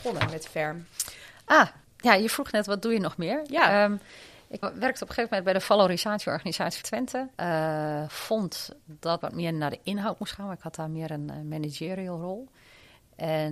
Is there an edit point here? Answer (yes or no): yes